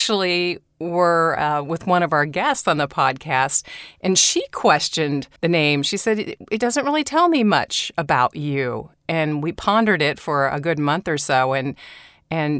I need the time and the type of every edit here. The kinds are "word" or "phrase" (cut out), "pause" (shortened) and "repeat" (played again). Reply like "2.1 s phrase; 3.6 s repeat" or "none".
5.4 s pause